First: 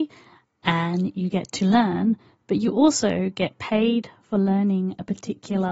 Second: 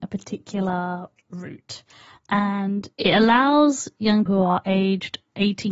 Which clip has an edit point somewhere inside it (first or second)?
second